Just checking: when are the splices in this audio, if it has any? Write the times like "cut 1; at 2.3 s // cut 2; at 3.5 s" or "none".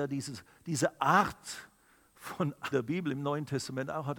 cut 1; at 2.7 s